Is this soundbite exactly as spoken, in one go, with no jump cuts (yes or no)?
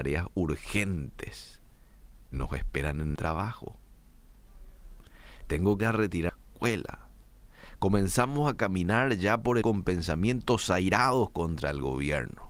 no